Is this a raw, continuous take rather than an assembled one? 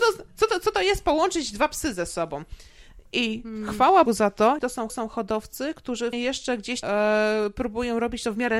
no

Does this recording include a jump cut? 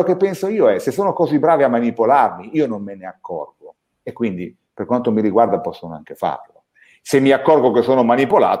no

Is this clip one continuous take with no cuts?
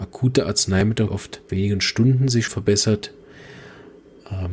no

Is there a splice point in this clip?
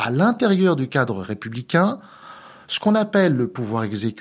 no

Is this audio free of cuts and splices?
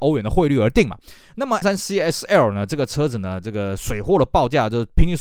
no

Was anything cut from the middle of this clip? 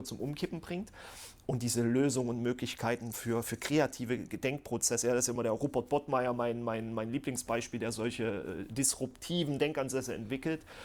no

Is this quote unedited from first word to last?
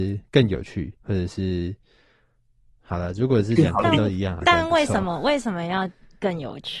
no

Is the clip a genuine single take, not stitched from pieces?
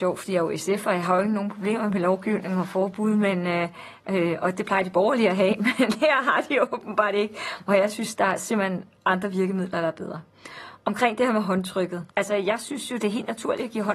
no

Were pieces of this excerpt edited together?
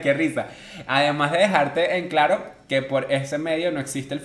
no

